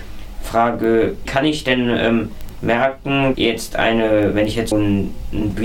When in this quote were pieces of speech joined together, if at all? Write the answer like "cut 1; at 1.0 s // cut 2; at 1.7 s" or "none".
cut 1; at 1.3 s // cut 2; at 3.3 s // cut 3; at 4.7 s